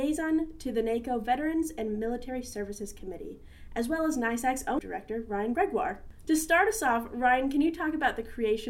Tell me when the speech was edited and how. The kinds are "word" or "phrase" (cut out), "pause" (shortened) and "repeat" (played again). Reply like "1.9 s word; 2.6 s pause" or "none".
4.8 s word

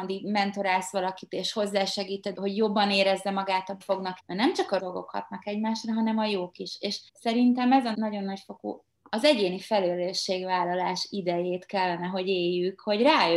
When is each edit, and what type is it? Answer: 2.3 s phrase; 3.8 s phrase; 4.2 s word; 4.8 s word; 7.1 s pause; 7.9 s word

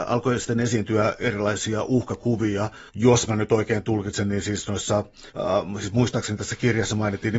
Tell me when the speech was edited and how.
2.9 s pause; 5.3 s pause

